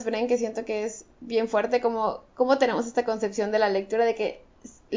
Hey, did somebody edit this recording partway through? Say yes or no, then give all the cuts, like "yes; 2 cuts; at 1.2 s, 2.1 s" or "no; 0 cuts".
no; 0 cuts